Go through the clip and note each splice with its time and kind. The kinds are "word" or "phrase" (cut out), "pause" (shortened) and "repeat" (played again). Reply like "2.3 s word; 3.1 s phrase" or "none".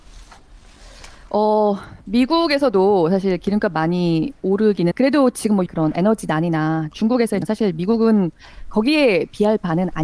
4.9 s word; 5.7 s word; 7.4 s phrase